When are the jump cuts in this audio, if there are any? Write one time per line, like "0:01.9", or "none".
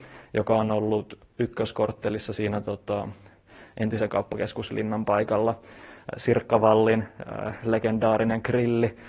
none